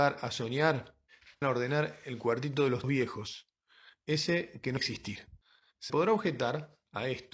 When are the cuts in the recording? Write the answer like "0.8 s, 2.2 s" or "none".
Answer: 1.4 s, 2.8 s, 4.8 s, 5.9 s